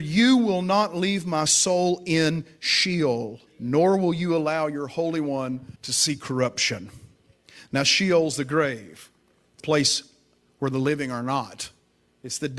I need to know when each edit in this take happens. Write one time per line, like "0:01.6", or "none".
0:03.5
0:05.8
0:09.6